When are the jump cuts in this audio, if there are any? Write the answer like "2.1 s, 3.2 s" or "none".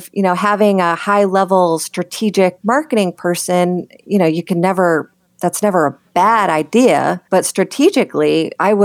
5.3 s, 7.3 s

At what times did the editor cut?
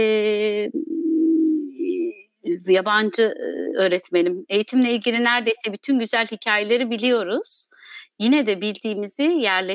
none

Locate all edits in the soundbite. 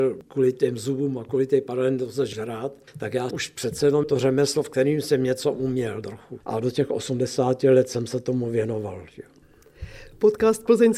2.3 s, 2.9 s, 3.3 s, 4.0 s

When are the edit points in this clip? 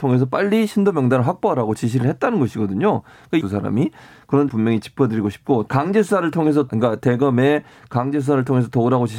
3.4 s, 4.5 s, 5.7 s, 6.7 s

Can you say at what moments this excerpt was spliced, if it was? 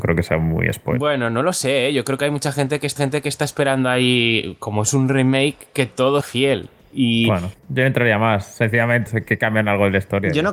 3.0 s, 6.2 s, 7.6 s, 9.1 s

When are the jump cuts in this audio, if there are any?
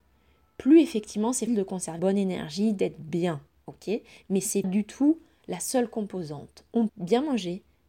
1.5 s, 2.0 s, 4.6 s, 6.9 s

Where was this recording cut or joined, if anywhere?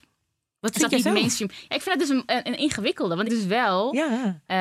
3.3 s

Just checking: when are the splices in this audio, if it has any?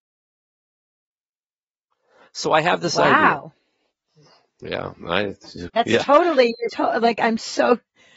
5.7 s, 6.7 s

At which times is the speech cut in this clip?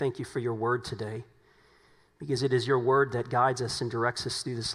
none

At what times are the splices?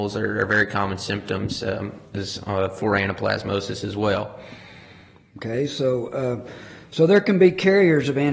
none

